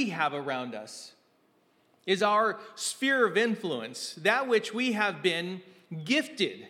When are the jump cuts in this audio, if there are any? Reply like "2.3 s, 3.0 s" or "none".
none